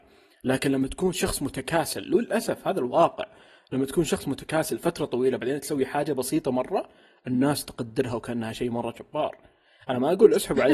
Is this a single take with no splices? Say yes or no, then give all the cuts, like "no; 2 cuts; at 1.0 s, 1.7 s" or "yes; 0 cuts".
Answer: yes; 0 cuts